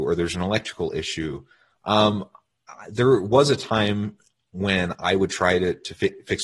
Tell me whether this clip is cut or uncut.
uncut